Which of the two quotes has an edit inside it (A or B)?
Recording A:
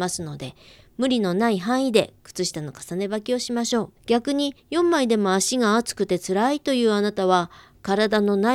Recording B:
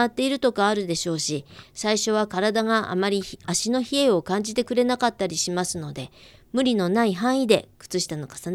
A